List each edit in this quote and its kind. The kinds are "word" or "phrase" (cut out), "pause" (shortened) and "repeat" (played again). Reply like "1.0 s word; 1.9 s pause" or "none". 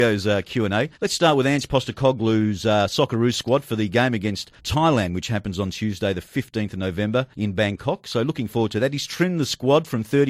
0.9 s pause; 4.6 s pause; 7.3 s pause